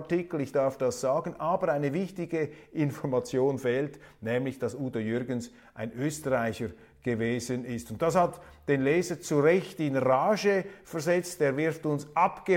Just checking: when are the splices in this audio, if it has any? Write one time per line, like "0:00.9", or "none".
none